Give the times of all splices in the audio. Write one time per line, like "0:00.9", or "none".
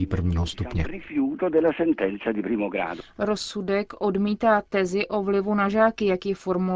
none